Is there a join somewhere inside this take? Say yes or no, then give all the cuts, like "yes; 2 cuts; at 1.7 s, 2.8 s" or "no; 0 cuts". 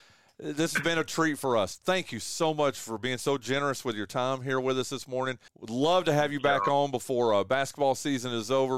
yes; 1 cut; at 5.5 s